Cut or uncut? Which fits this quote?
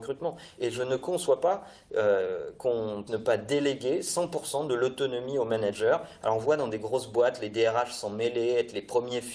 cut